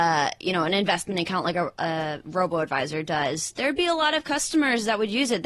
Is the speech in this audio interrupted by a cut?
no; 0 cuts

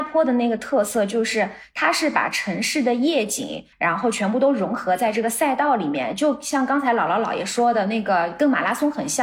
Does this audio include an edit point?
yes; 1 cut; at 3.7 s

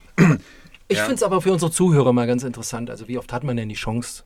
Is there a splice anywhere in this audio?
no; 0 cuts

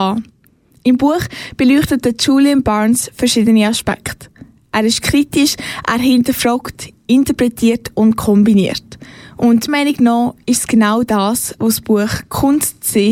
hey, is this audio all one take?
no; 1 cut; at 9.7 s

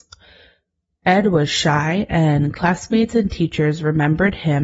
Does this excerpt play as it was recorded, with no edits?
yes; 0 cuts

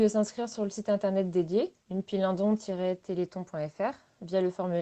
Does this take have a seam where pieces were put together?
yes; 1 cut; at 1.8 s

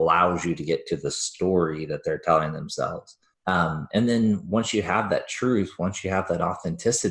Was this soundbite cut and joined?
yes; 1 cut; at 3.3 s

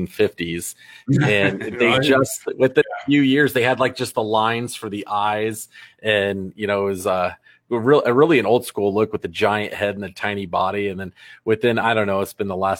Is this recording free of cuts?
yes; 0 cuts

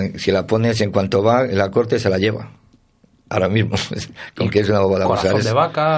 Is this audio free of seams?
yes; 0 cuts

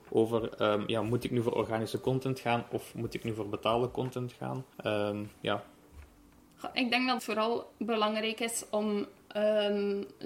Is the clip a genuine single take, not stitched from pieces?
no; 2 cuts; at 4.7 s, 7.2 s

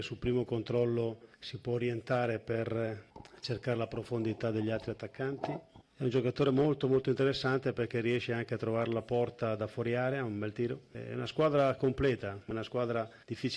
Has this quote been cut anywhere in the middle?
no; 0 cuts

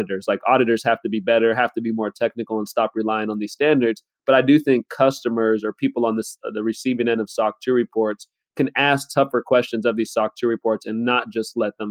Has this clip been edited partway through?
no; 0 cuts

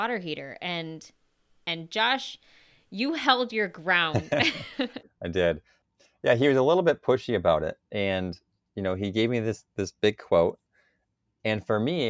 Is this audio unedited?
yes; 0 cuts

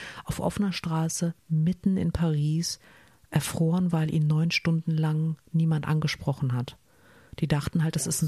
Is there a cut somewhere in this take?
no; 0 cuts

